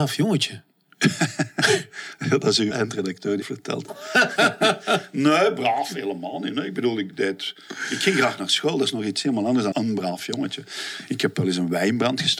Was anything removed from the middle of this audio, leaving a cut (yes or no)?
yes